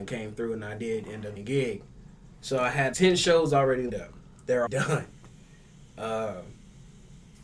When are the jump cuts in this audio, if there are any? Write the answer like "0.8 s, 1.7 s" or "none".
1.4 s, 2.9 s, 3.9 s, 4.7 s